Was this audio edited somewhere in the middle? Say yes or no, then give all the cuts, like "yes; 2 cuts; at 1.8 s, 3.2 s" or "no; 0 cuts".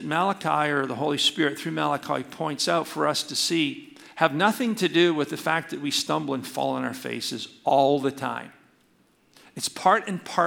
no; 0 cuts